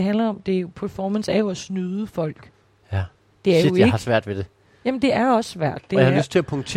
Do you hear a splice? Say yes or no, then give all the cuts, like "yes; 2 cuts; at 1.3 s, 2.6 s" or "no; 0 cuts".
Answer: no; 0 cuts